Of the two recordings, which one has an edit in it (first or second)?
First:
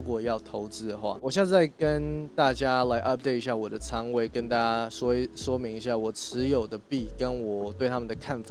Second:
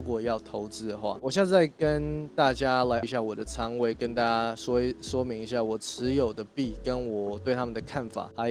second